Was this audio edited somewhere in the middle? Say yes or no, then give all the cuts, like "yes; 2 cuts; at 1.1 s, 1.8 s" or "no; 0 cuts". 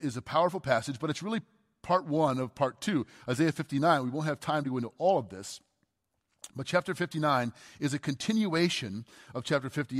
no; 0 cuts